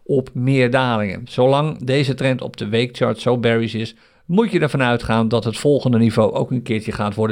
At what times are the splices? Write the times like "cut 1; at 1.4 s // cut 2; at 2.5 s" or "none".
none